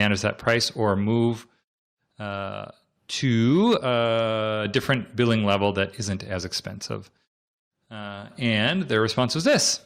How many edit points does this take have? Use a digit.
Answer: 0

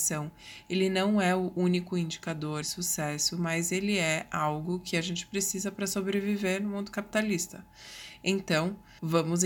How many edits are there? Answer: 1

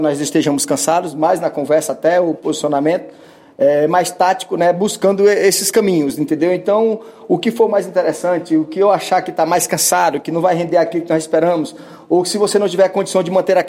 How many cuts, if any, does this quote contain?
0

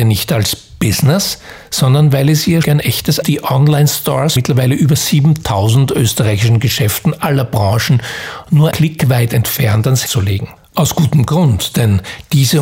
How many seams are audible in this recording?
6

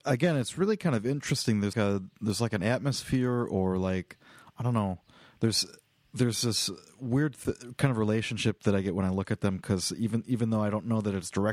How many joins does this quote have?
1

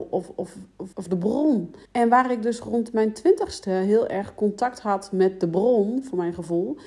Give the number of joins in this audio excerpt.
2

